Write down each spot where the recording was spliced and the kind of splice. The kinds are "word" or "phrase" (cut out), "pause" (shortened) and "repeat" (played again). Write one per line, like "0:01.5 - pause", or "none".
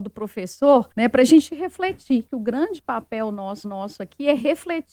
0:00.9 - pause
0:02.3 - phrase
0:03.6 - repeat